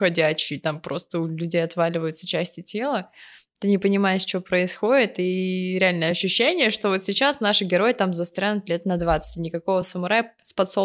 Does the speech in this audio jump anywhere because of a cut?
no; 0 cuts

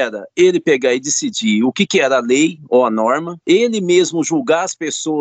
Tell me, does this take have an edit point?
no; 0 cuts

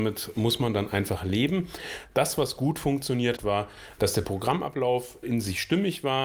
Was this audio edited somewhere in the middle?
yes; 2 cuts; at 3.4 s, 5.2 s

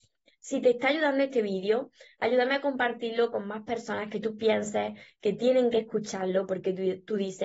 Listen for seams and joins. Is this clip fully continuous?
yes; 0 cuts

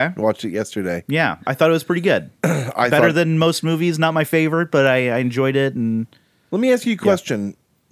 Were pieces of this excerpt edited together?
no; 0 cuts

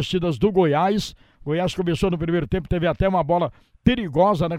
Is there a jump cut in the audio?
no; 0 cuts

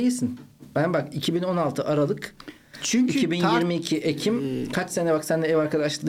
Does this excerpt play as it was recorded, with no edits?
yes; 0 cuts

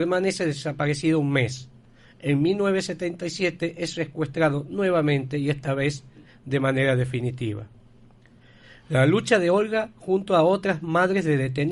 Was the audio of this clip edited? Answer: no; 0 cuts

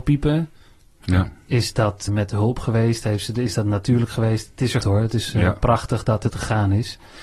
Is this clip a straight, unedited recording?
no; 3 cuts; at 2.1 s, 4.8 s, 6.3 s

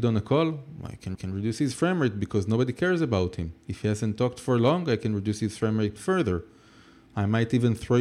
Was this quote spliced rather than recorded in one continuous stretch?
yes; 2 cuts; at 1.1 s, 6.0 s

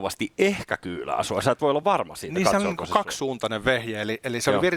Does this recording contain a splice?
no; 0 cuts

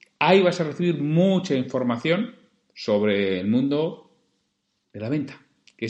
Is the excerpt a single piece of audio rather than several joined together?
yes; 0 cuts

